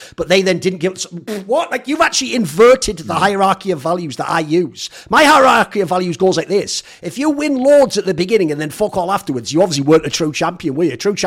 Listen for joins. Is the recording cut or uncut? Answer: uncut